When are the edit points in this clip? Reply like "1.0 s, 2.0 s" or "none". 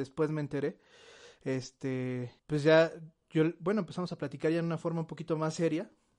2.4 s